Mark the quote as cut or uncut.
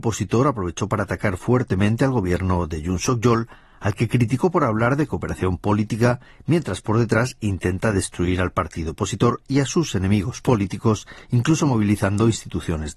uncut